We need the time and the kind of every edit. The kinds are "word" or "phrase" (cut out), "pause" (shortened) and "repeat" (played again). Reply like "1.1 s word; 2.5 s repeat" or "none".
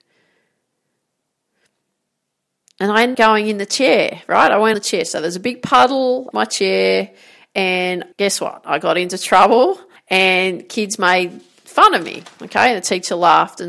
3.1 s word; 4.7 s word; 6.3 s word; 8.1 s pause; 10.0 s pause